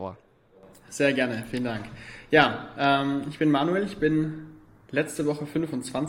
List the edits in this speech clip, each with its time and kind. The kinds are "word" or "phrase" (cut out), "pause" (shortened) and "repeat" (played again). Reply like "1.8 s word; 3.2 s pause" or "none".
none